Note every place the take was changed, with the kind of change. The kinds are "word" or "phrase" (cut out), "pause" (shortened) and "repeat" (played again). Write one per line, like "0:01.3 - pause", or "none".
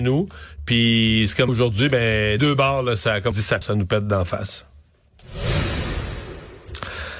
0:01.5 - word
0:02.4 - word
0:03.3 - word
0:03.6 - word

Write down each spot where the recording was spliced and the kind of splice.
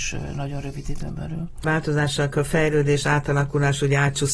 0:02.3 - word

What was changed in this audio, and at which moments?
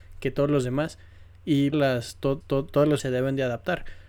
0:01.7 - phrase
0:02.4 - repeat
0:03.0 - word

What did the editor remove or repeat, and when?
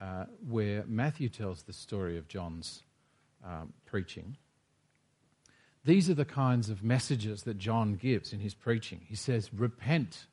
none

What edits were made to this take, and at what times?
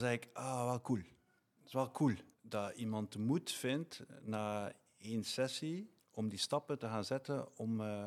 0:01.4 - pause
0:02.3 - pause
0:06.0 - word

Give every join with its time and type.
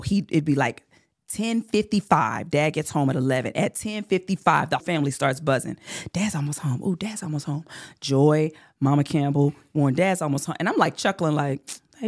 0:04.8 - word

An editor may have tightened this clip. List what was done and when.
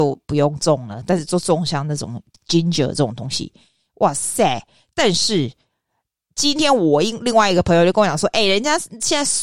none

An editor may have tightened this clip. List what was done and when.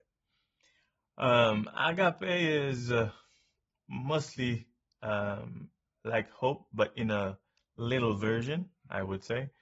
none

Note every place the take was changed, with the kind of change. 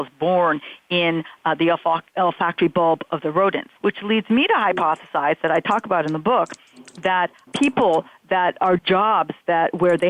0:02.1 - pause
0:03.8 - pause
0:07.5 - word
0:08.8 - word

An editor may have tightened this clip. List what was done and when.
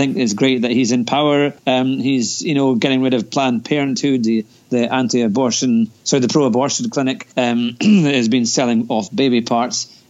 0:01.6 - pause
0:07.3 - pause

